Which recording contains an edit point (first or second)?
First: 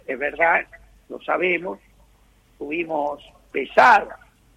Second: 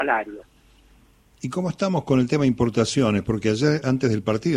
first